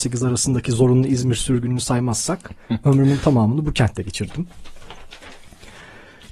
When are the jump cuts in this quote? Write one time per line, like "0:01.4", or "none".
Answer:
none